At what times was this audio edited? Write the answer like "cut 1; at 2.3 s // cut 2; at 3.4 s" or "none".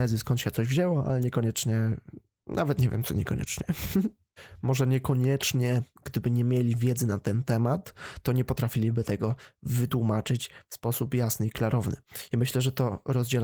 none